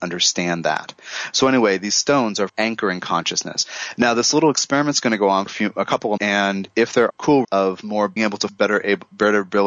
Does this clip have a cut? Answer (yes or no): yes